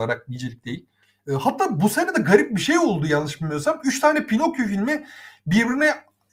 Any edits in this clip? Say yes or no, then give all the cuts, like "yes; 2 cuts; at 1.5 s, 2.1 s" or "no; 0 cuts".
no; 0 cuts